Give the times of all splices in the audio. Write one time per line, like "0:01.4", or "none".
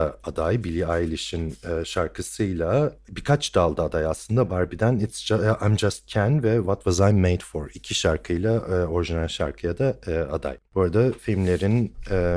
0:10.7

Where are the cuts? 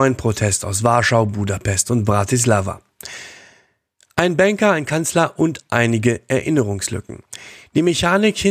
none

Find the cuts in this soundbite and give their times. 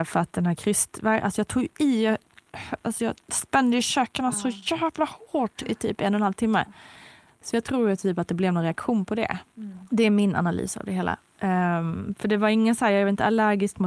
none

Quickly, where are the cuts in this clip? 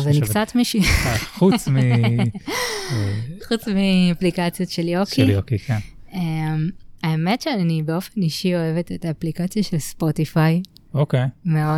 0:07.0

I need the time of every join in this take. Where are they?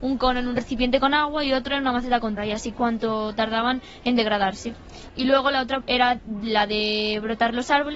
0:02.4
0:02.7
0:05.1
0:05.8

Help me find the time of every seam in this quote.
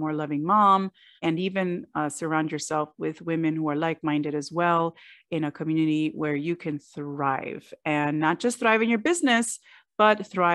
none

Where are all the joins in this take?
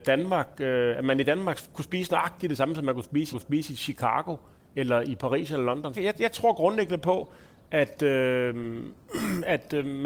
0:03.3
0:05.9

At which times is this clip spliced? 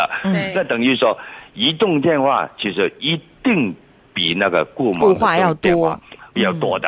none

